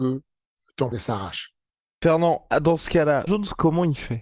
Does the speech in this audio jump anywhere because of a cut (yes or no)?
yes